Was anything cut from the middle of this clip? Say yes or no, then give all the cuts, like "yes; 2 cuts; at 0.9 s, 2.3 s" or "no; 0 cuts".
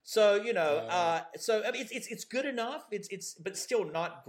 no; 0 cuts